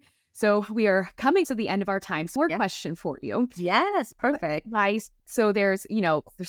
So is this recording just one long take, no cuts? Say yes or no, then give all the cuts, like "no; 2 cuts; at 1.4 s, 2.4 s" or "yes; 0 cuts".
no; 3 cuts; at 1.4 s, 2.4 s, 5.2 s